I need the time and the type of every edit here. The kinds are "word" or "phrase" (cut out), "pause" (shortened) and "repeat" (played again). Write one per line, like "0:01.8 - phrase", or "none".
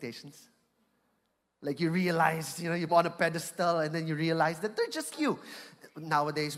0:02.9 - phrase
0:05.1 - word